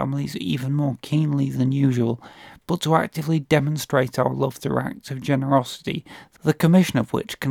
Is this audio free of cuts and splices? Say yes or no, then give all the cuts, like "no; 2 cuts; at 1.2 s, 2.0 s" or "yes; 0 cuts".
yes; 0 cuts